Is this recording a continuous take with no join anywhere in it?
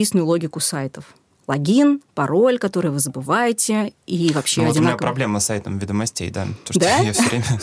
yes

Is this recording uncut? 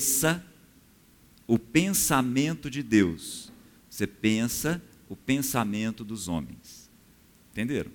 yes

